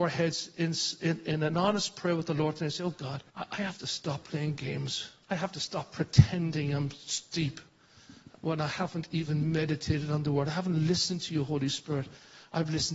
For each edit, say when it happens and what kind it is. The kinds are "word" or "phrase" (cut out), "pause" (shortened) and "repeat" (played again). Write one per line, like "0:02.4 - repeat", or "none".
0:03.3 - pause
0:05.2 - pause